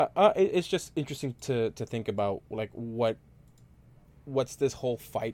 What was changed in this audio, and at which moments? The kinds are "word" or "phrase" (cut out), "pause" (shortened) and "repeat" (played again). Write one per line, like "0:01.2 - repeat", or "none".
none